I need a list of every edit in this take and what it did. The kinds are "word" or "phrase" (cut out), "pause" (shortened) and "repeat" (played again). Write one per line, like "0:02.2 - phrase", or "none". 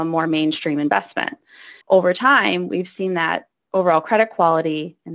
0:01.8 - pause